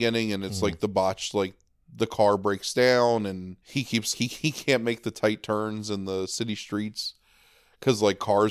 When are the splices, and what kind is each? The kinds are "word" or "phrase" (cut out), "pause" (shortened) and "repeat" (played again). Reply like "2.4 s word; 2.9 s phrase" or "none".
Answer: 3.6 s pause; 4.1 s word